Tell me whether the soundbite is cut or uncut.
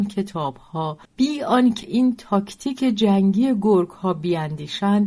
cut